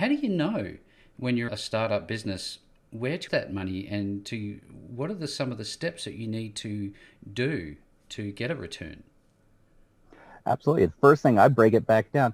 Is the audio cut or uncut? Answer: cut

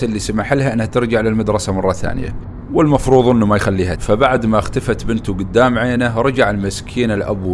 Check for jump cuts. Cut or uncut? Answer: cut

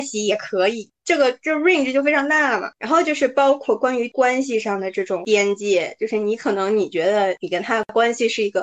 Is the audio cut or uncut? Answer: uncut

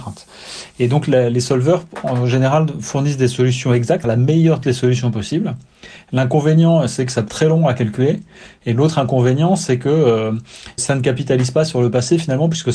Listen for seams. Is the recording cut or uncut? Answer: cut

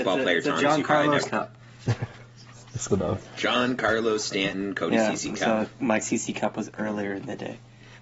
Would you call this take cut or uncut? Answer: cut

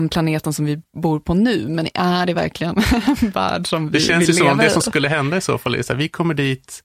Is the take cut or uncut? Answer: uncut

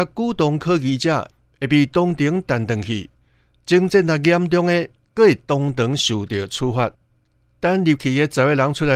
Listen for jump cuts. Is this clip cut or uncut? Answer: uncut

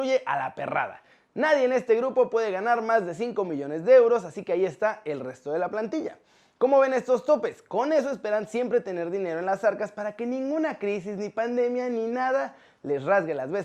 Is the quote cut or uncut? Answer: uncut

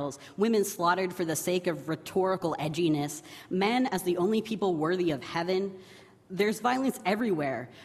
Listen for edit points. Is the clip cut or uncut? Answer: uncut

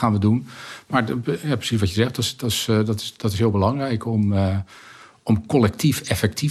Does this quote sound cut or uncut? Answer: uncut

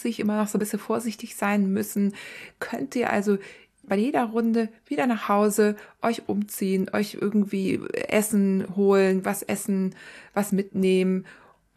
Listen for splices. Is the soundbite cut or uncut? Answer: uncut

